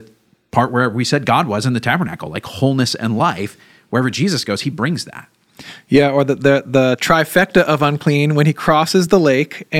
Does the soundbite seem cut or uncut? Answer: uncut